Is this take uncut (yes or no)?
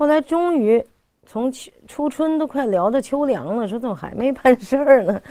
yes